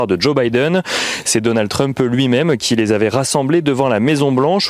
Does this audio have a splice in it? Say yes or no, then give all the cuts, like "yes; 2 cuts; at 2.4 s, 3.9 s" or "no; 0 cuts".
no; 0 cuts